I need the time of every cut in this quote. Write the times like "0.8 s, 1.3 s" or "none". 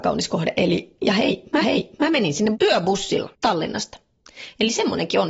1.6 s, 2.5 s, 3.3 s

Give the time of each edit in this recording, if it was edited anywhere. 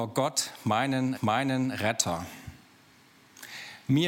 1.1 s

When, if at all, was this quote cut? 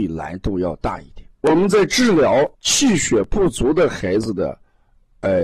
1.3 s, 2.5 s

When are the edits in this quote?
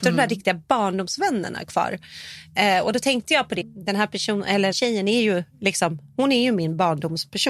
3.6 s, 4.7 s

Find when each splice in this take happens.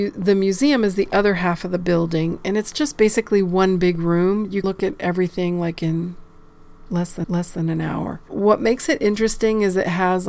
4.6 s, 7.2 s

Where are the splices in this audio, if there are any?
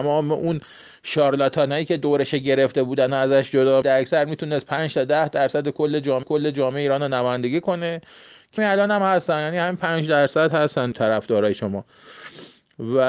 3.8 s, 6.2 s, 8.6 s, 10.9 s

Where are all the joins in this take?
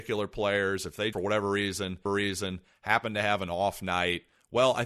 1.1 s, 2.1 s

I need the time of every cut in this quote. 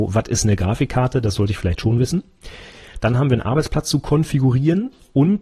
none

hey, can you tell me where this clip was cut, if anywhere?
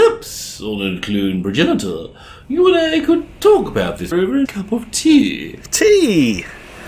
4.1 s, 4.5 s

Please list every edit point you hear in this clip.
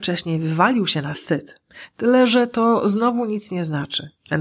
1.1 s

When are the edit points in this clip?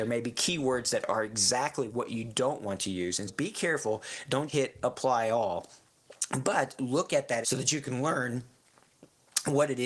3.3 s, 4.5 s, 7.4 s

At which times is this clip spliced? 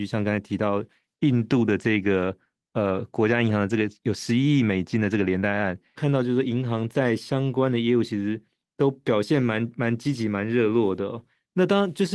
none

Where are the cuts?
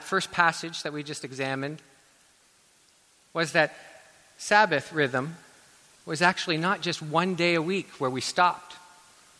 none

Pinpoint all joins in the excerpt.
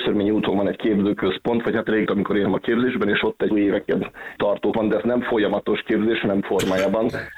2.1 s, 2.4 s, 3.5 s, 4.4 s, 4.7 s, 6.4 s

